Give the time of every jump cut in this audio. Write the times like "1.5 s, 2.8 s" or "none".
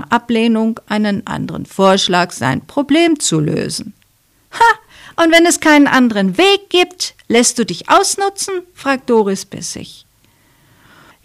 none